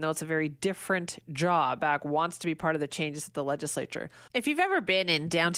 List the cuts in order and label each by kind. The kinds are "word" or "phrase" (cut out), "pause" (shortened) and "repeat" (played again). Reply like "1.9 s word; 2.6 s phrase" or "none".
1.8 s phrase